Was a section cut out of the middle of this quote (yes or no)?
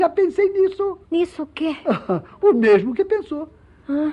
yes